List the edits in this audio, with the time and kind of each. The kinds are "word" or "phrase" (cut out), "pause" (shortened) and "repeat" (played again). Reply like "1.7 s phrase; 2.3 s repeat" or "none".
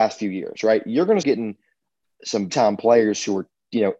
1.2 s word; 2.5 s word